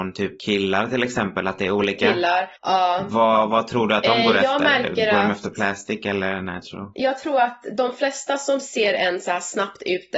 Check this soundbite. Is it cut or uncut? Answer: cut